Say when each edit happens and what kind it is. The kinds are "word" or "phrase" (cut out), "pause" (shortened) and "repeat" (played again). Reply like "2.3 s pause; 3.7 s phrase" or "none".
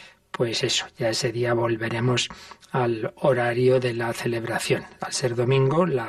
none